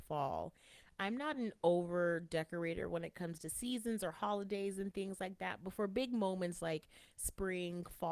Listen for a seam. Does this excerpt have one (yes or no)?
no